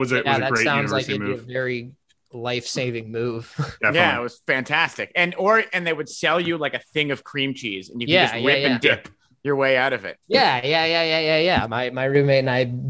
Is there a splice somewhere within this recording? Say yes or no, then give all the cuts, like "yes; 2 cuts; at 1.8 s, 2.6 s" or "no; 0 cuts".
no; 0 cuts